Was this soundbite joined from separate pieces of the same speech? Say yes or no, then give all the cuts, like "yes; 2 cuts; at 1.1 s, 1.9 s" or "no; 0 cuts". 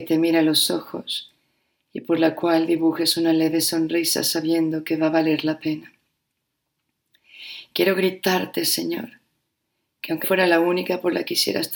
yes; 1 cut; at 10.2 s